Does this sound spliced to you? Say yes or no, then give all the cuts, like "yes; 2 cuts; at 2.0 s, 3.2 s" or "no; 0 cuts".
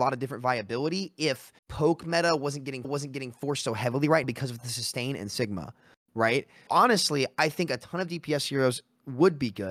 yes; 4 cuts; at 1.6 s, 2.8 s, 4.2 s, 6.7 s